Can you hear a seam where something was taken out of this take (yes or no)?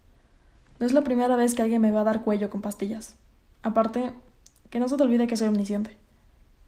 no